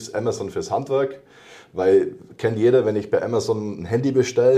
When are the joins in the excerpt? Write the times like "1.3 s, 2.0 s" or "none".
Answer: none

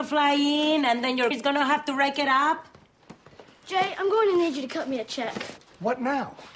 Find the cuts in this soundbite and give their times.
1.3 s

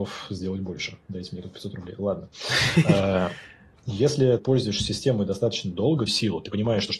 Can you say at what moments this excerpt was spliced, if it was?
4.4 s, 6.1 s

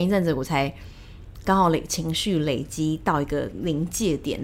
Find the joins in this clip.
1.4 s

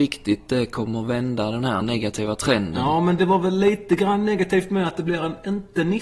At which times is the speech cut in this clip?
none

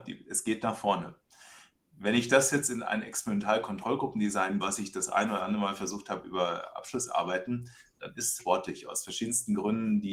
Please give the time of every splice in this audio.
4.6 s, 8.4 s

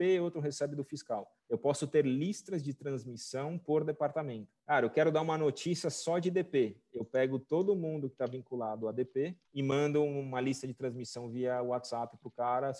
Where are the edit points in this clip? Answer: 1.4 s, 4.6 s, 9.4 s

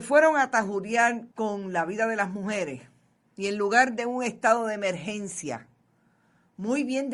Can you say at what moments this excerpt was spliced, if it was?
1.3 s

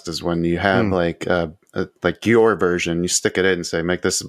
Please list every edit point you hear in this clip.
2.0 s

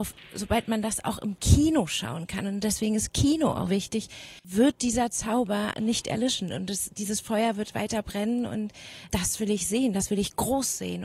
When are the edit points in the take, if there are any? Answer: 3.7 s, 5.7 s, 9.1 s

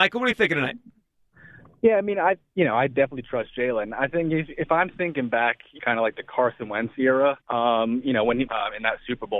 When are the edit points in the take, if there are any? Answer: 5.8 s, 7.4 s, 8.5 s

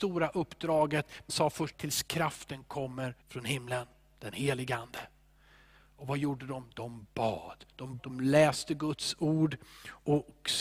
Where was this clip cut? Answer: 1.3 s, 1.7 s, 3.2 s, 8.0 s

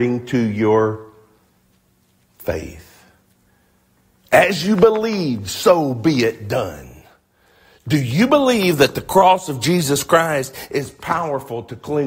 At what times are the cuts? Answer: none

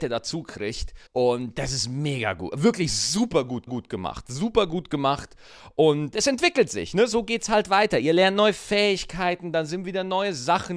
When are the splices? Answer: 1.1 s, 3.7 s, 6.1 s

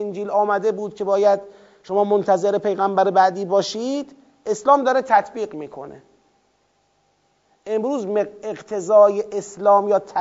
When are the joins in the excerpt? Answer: none

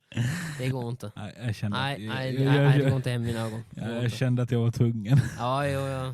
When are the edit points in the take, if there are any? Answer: none

